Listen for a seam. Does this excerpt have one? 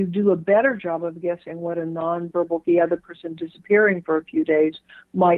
yes; 1 cut; at 2.6 s

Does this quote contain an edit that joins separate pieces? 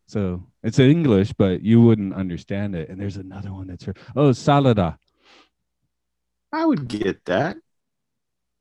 no; 0 cuts

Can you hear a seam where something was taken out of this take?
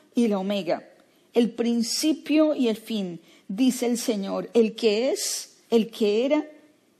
yes; 1 cut; at 5.6 s

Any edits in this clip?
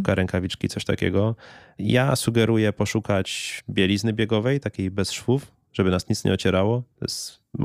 no; 0 cuts

